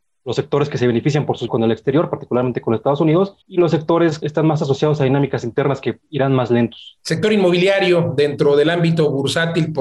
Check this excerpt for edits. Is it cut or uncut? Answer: cut